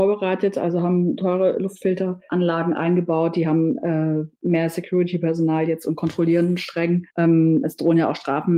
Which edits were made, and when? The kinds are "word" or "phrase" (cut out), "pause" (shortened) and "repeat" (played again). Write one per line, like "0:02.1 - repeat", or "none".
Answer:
0:07.1 - pause